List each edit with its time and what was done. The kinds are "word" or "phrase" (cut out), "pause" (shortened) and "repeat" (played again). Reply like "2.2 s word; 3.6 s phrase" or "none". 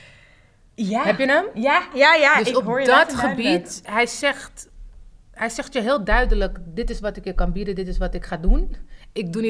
1.9 s word; 3.8 s word